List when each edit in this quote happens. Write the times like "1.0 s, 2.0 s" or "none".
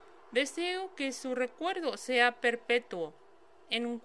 none